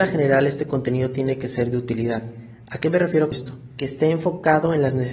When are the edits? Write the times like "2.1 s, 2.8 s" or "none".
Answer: 3.3 s